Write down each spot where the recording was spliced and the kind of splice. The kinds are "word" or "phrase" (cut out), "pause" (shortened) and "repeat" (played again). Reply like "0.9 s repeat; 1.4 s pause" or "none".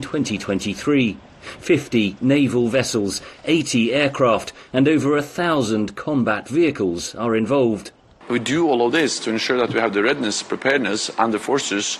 none